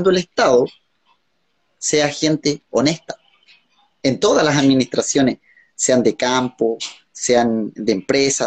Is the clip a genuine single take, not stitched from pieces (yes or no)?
yes